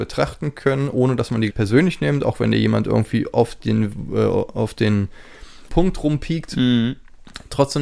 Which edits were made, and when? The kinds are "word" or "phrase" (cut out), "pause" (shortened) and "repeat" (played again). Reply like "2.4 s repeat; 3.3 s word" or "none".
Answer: 1.5 s word; 5.7 s word